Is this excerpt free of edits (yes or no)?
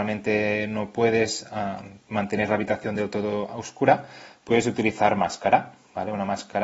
yes